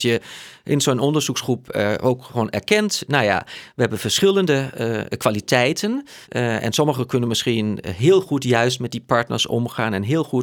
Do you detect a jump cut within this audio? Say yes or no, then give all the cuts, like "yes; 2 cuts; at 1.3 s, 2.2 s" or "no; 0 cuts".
yes; 1 cut; at 6.2 s